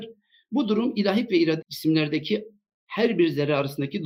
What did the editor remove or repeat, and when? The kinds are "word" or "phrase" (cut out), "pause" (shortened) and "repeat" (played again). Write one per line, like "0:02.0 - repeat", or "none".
0:01.3 - word
0:01.6 - word